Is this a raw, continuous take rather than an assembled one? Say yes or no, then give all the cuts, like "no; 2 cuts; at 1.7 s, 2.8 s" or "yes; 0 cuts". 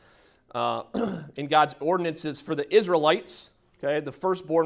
yes; 0 cuts